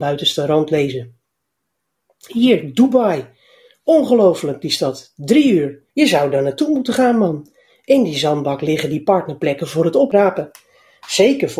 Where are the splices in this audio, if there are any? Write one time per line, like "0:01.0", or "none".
0:05.9